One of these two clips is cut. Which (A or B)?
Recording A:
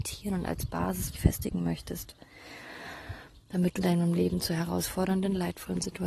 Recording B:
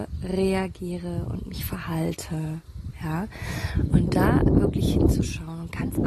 A